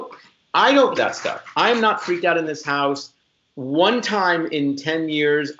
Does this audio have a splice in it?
yes; 1 cut; at 1.0 s

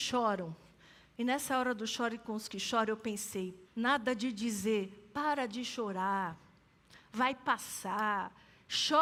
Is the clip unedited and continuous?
no; 1 cut; at 3.6 s

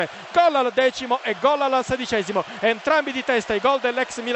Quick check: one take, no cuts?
yes; 0 cuts

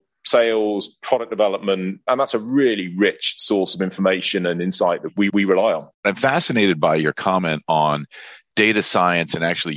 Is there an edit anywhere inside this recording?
yes; 2 cuts; at 5.3 s, 5.9 s

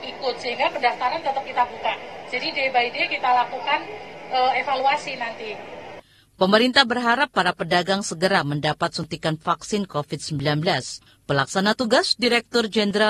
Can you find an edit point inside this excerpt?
no; 0 cuts

